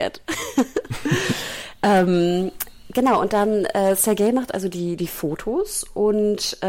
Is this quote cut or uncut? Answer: uncut